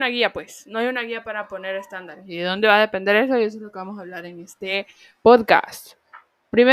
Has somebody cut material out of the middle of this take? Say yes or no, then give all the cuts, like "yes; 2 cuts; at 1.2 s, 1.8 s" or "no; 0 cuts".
no; 0 cuts